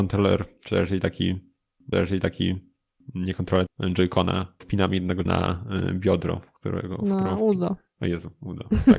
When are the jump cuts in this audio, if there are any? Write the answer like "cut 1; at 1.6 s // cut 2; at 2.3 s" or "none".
cut 1; at 1.9 s // cut 2; at 3.7 s // cut 3; at 4.6 s // cut 4; at 5.3 s

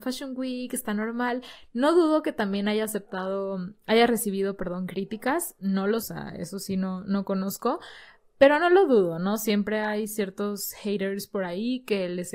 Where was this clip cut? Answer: cut 1; at 6.0 s

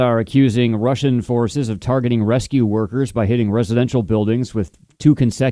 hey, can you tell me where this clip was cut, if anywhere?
none

